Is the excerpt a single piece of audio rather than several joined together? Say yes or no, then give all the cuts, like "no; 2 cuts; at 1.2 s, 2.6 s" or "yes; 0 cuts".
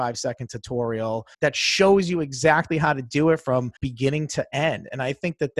no; 2 cuts; at 1.3 s, 3.8 s